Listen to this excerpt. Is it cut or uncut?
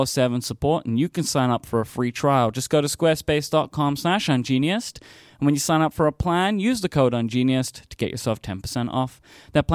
uncut